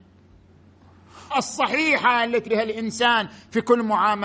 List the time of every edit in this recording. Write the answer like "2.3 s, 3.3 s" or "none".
1.3 s, 2.5 s